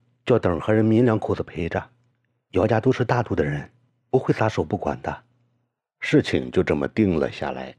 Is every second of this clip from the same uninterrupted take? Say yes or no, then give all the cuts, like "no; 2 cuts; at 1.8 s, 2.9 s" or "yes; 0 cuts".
yes; 0 cuts